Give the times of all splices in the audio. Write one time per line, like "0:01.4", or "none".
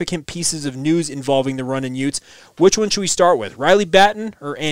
none